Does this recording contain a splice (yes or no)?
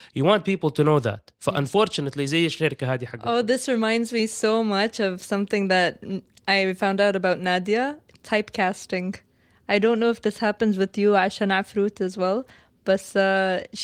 no